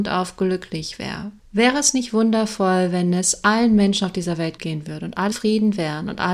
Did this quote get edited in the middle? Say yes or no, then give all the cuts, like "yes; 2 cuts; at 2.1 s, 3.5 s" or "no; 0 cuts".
yes; 3 cuts; at 1.4 s, 4.6 s, 5.3 s